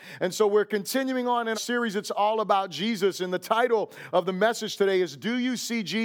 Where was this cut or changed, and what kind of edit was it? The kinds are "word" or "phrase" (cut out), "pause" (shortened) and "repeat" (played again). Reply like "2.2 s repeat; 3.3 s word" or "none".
1.5 s word